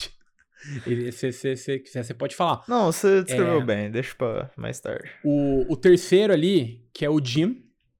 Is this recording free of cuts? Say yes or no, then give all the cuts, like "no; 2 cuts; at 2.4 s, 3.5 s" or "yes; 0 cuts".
yes; 0 cuts